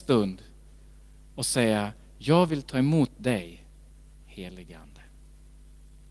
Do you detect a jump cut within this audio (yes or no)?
no